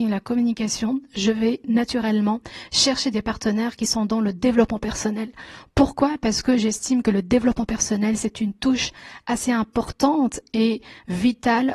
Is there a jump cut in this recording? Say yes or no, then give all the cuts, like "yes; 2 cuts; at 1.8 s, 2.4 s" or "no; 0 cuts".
no; 0 cuts